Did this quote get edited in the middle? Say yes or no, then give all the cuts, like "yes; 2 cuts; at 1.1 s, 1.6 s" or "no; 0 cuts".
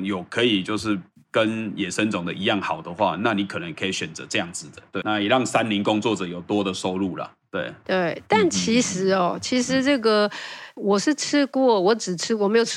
yes; 2 cuts; at 5.0 s, 10.8 s